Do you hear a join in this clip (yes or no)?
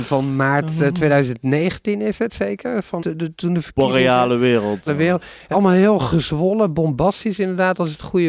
yes